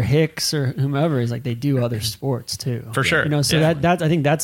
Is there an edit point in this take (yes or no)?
no